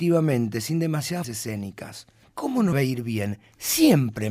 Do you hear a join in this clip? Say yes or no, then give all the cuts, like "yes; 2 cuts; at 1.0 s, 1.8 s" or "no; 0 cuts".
yes; 3 cuts; at 1.2 s, 2.2 s, 2.7 s